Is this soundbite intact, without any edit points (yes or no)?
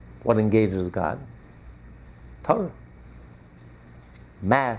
no